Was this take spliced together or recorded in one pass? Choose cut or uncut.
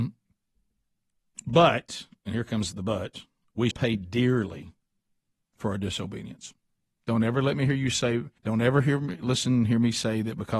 cut